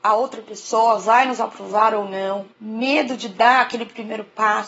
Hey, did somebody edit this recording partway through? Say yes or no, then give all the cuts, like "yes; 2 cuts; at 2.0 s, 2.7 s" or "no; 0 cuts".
yes; 1 cut; at 2.5 s